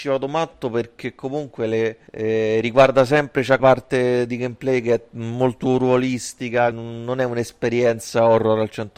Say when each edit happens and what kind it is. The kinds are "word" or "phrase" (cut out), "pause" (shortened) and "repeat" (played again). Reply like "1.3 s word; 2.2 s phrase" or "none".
2.1 s pause; 3.6 s phrase; 6.7 s word

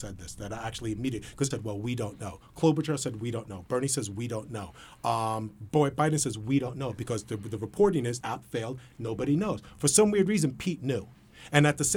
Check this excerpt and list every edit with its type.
1.5 s phrase; 8.2 s word

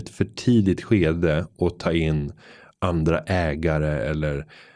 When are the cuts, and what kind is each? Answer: none

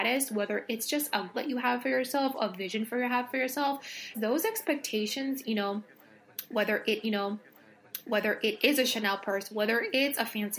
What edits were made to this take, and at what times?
1.3 s word; 4.1 s word; 5.4 s word; 7.0 s repeat

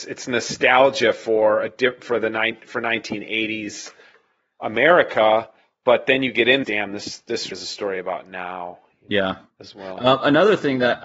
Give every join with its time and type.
6.6 s phrase; 7.5 s word

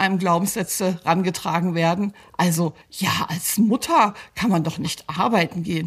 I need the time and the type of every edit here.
2.8 s pause

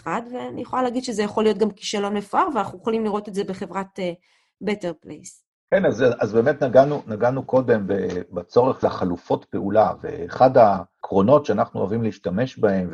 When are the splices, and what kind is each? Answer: 5.5 s pause; 8.8 s phrase

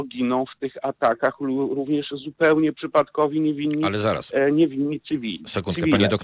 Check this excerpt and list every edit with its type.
none

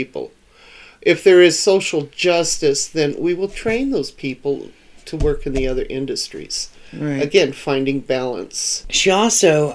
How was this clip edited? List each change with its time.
none

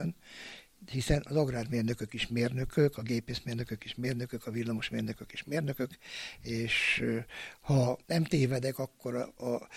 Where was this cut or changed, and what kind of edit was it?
8.0 s pause

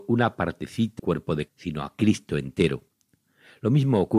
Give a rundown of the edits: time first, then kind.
1.0 s word; 1.5 s word

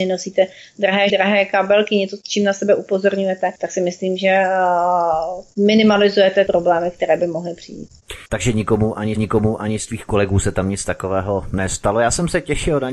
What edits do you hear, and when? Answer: 1.1 s word; 3.6 s pause; 6.5 s word; 8.3 s pause; 9.2 s repeat

